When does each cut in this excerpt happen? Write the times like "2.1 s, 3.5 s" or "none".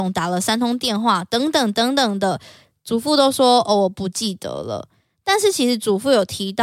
none